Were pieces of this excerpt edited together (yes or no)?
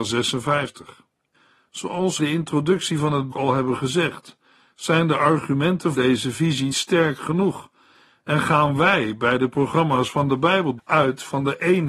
yes